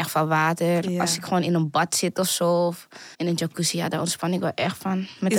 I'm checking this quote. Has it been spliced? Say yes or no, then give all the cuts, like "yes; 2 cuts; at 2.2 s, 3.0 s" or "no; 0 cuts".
yes; 1 cut; at 3.1 s